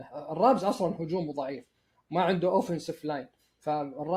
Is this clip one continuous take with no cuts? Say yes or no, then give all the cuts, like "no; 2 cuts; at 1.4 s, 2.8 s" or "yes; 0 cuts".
yes; 0 cuts